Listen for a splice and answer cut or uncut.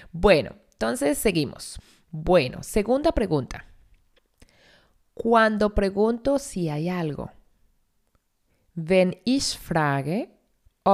uncut